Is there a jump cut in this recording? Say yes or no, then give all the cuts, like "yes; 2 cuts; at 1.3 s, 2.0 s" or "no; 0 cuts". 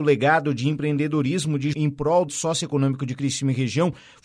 yes; 2 cuts; at 1.7 s, 2.3 s